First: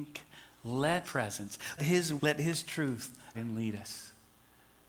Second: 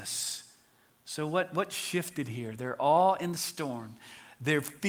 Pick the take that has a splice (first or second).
first